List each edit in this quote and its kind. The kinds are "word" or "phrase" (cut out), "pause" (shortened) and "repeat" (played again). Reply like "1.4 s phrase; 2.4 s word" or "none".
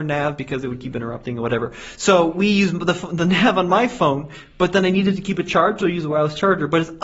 none